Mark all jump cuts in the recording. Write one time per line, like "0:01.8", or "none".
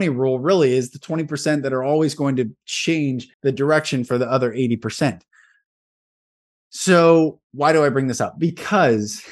0:03.3
0:07.4